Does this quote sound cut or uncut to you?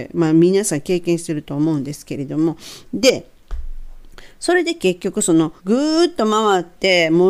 cut